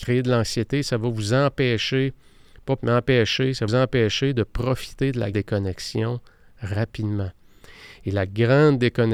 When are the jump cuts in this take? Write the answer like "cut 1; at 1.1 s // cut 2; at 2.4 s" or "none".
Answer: cut 1; at 2.8 s // cut 2; at 3.7 s // cut 3; at 5.3 s